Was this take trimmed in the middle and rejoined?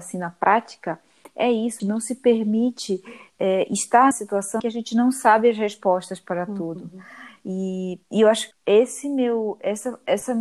yes; 5 cuts; at 1.8 s, 4.1 s, 4.6 s, 8.0 s, 8.5 s

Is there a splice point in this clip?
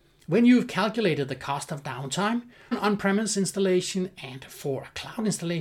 yes; 1 cut; at 2.7 s

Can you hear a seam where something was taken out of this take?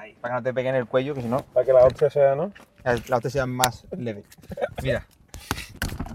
no; 0 cuts

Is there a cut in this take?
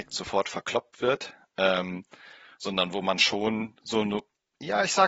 no; 0 cuts

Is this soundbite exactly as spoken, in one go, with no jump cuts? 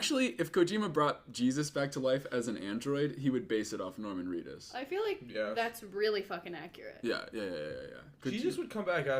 yes; 0 cuts

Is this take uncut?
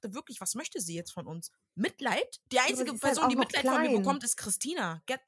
no; 1 cut; at 2.4 s

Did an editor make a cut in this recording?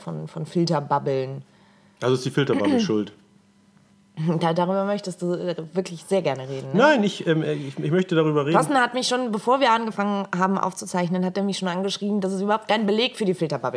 no; 0 cuts

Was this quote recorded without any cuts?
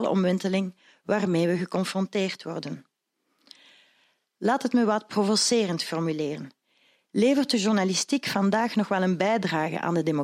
yes; 0 cuts

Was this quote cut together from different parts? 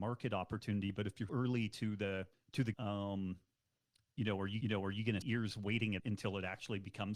yes; 6 cuts; at 1.3 s, 2.3 s, 2.7 s, 4.6 s, 5.2 s, 6.0 s

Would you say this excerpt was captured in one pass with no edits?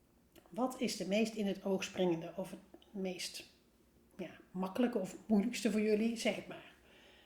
yes; 0 cuts

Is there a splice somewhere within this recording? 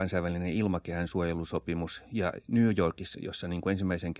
yes; 1 cut; at 3.1 s

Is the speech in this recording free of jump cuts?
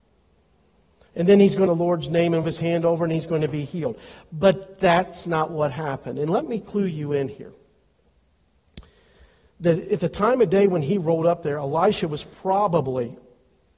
no; 2 cuts; at 1.7 s, 2.4 s

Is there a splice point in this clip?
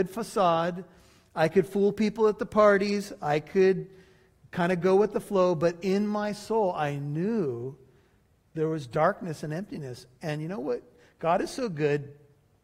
no; 0 cuts

